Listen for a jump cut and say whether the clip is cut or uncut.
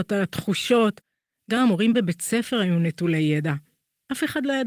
uncut